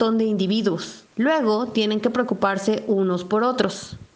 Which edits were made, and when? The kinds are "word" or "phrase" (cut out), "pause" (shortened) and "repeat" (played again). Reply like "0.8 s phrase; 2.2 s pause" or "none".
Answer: 1.1 s pause